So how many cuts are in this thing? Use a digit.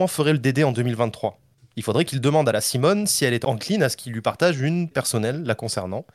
1